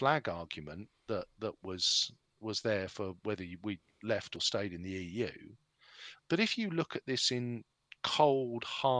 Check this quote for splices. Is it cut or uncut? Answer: uncut